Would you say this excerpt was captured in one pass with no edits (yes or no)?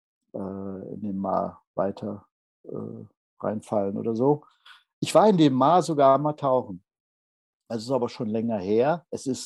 yes